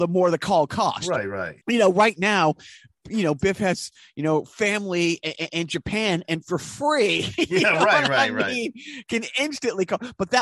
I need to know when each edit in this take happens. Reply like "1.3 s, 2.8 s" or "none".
1.6 s